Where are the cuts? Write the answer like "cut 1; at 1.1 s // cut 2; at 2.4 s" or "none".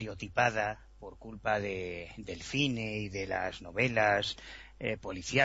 none